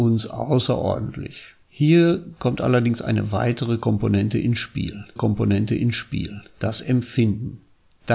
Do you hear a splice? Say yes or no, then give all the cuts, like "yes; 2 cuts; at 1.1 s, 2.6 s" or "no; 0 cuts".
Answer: yes; 2 cuts; at 1.6 s, 5.2 s